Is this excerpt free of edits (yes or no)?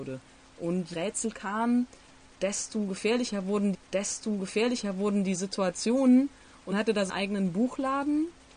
no